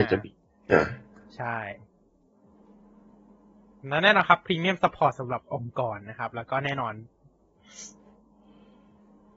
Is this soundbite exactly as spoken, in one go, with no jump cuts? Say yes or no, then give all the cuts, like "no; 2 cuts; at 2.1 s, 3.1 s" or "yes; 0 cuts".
yes; 0 cuts